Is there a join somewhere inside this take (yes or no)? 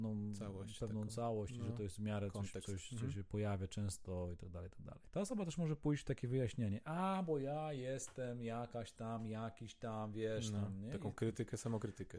no